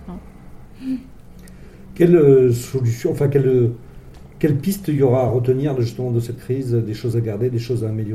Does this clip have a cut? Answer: no; 0 cuts

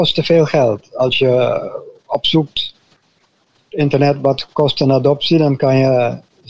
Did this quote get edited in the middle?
no; 0 cuts

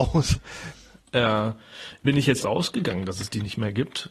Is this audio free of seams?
no; 2 cuts; at 2.0 s, 2.4 s

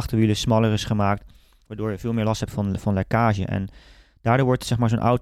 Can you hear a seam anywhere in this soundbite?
no; 0 cuts

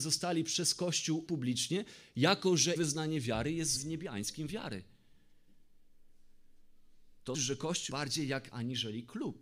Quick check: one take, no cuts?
no; 7 cuts; at 1.3 s, 2.8 s, 3.8 s, 4.5 s, 7.3 s, 7.9 s, 8.5 s

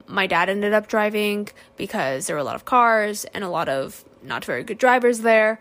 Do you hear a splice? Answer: no; 0 cuts

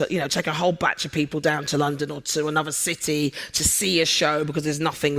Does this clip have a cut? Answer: no; 0 cuts

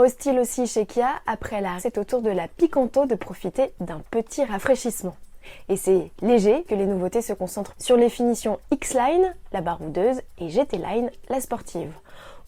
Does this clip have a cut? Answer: yes; 3 cuts; at 1.8 s, 6.7 s, 7.8 s

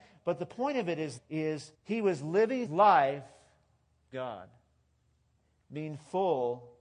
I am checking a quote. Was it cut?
yes; 4 cuts; at 1.2 s, 1.7 s, 2.7 s, 4.1 s

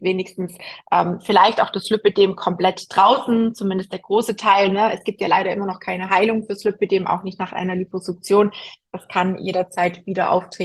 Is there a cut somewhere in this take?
no; 0 cuts

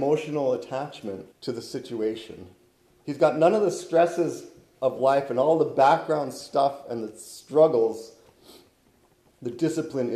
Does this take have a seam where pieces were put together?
yes; 2 cuts; at 1.3 s, 2.9 s

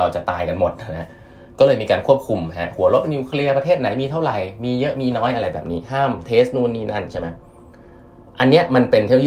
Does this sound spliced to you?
no; 0 cuts

